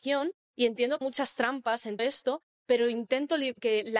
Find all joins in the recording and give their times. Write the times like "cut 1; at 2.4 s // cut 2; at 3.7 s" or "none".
cut 1; at 1.0 s // cut 2; at 2.0 s